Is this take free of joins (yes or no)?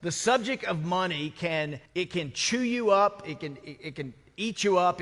no